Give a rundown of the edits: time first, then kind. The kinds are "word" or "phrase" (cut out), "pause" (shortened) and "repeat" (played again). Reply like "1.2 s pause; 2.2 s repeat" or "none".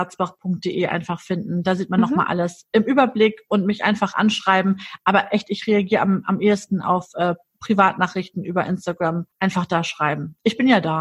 9.3 s pause